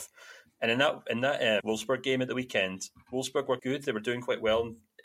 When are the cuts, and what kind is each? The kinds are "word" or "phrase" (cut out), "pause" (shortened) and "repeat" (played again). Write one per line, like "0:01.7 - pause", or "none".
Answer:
0:01.6 - word
0:03.6 - word